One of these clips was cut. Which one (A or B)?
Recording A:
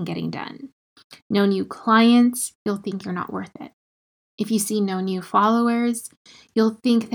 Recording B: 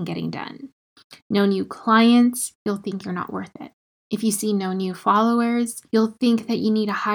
B